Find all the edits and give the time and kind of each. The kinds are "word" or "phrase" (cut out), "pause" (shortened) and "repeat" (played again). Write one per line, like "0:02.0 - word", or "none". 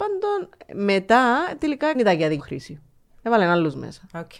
0:01.9 - phrase
0:02.4 - word